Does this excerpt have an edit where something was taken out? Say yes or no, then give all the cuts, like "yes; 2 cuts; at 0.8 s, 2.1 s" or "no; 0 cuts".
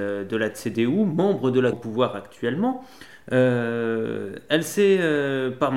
yes; 1 cut; at 1.7 s